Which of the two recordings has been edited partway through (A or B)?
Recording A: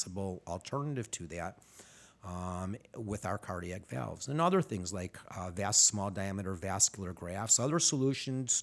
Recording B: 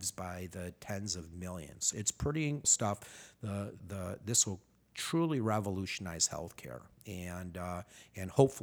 B